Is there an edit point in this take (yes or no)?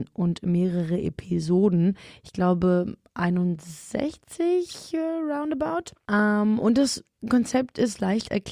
no